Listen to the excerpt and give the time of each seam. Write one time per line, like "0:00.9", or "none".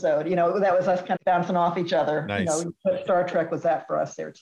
0:01.2